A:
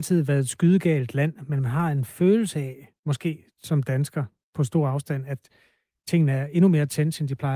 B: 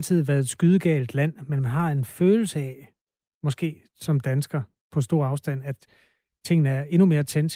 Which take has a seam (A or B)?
A